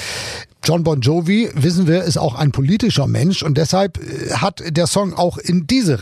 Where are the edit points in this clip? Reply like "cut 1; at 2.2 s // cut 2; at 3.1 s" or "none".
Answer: none